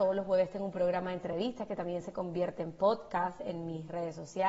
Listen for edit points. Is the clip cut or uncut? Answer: uncut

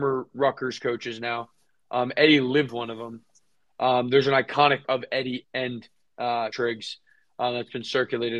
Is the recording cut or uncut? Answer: cut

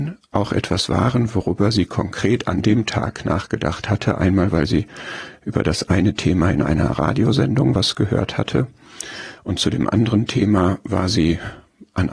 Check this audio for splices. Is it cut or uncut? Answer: uncut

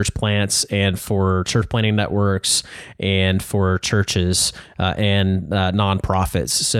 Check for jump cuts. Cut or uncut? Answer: uncut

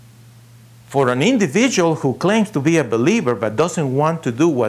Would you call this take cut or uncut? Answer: uncut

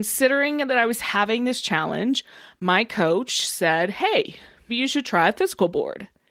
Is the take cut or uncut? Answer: cut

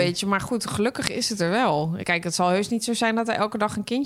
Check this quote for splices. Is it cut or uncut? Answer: uncut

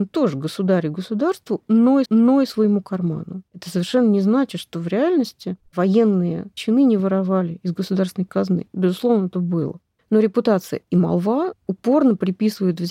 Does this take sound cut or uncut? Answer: cut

